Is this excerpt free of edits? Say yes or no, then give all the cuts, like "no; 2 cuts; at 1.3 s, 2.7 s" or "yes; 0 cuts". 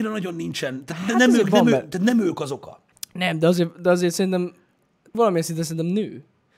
no; 1 cut; at 5.1 s